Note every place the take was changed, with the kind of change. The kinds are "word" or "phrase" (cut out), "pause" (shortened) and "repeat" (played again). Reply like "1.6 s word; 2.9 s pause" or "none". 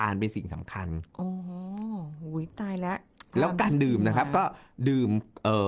3.3 s pause